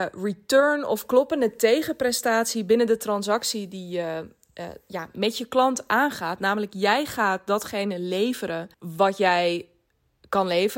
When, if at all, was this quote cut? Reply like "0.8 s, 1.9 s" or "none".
8.7 s

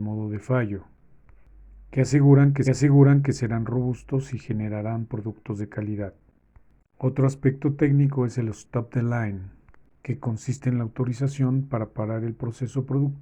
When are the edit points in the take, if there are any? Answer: 2.6 s

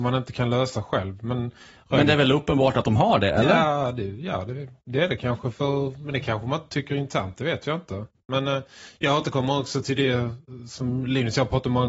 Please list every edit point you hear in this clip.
none

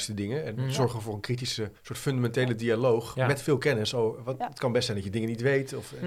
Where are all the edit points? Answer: 1.8 s

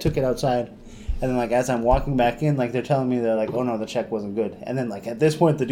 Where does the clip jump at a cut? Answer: none

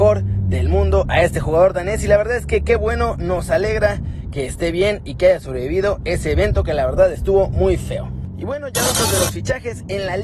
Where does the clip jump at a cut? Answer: none

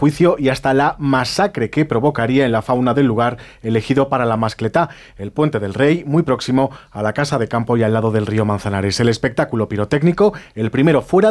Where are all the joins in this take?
none

